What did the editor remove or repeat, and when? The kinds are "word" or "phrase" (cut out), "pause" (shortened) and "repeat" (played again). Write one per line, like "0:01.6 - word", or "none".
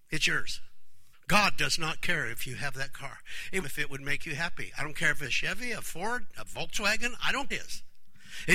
0:01.1 - pause
0:03.6 - phrase
0:05.2 - word
0:07.5 - phrase

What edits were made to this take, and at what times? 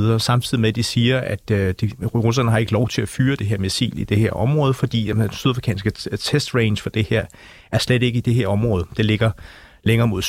none

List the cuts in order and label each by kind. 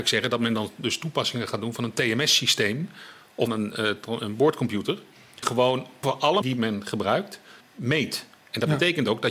0:03.5 - word
0:05.4 - word
0:06.0 - word
0:06.4 - word
0:07.6 - word

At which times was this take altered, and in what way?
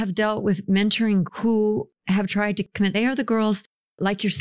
0:01.3 - word
0:02.0 - pause
0:02.9 - phrase

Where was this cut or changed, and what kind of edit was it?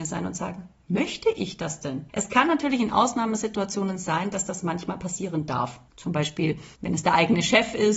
0:02.1 - pause
0:05.9 - pause
0:06.7 - pause

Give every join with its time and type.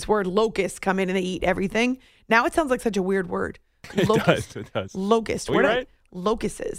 none

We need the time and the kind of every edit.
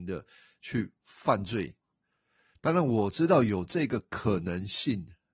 0:01.8 - pause

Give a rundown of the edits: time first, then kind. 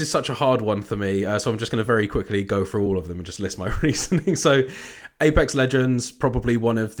none

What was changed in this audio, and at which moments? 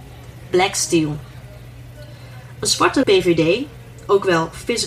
0:03.0 - word

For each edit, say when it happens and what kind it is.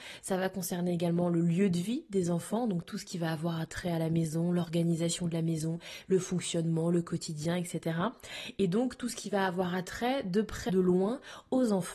0:10.7 - word

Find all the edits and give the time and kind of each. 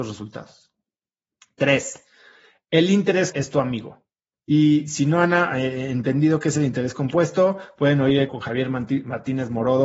0:03.3 - word
0:08.3 - word

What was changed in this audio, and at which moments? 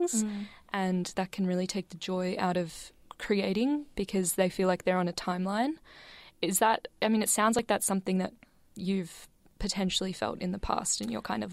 0:01.1 - word

